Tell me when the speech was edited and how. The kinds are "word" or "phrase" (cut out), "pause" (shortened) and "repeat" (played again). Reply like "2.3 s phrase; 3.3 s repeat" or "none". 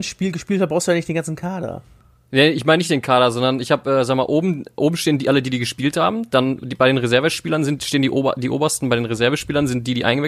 none